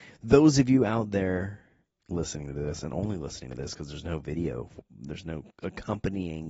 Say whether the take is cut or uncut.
uncut